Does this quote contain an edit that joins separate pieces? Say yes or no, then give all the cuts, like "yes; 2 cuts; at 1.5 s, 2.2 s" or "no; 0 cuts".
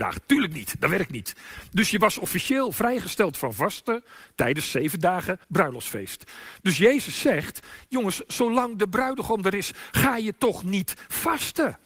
yes; 1 cut; at 5.4 s